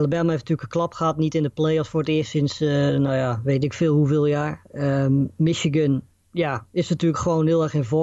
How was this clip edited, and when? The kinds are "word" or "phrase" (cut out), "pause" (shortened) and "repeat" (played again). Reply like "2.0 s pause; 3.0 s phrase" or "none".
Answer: 6.1 s pause